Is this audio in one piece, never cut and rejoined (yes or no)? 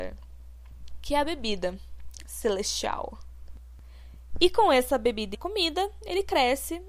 no